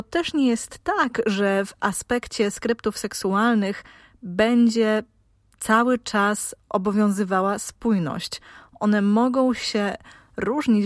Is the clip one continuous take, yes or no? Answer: yes